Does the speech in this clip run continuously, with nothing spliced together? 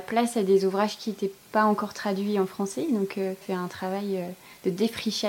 no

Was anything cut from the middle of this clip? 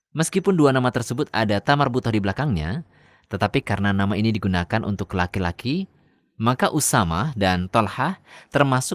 no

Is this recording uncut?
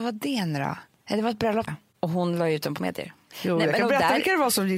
no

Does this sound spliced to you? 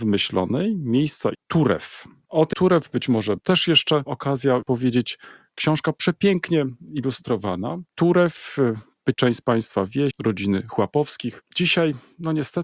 yes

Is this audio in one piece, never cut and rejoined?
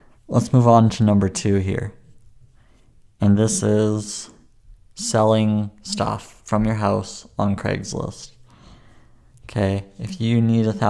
yes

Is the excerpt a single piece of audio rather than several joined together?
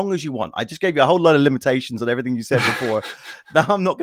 yes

